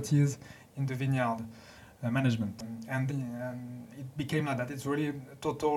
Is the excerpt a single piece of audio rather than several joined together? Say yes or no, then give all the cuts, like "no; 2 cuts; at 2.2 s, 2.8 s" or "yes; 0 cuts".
no; 1 cut; at 3.1 s